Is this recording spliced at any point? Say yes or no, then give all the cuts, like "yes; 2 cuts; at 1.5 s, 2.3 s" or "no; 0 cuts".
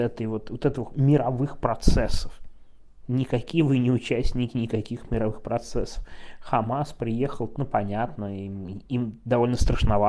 yes; 1 cut; at 7.6 s